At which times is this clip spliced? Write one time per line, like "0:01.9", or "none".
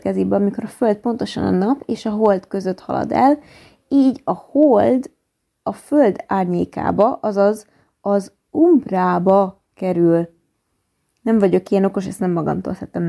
none